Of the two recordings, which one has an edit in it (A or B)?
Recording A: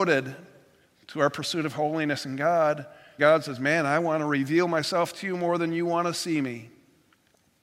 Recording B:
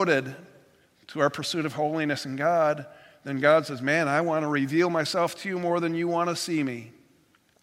A